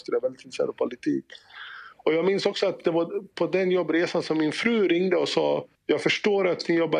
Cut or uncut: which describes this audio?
uncut